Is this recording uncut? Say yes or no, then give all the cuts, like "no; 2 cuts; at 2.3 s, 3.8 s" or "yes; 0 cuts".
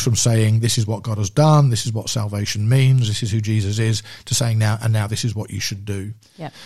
yes; 0 cuts